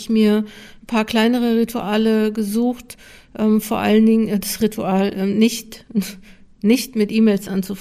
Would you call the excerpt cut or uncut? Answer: uncut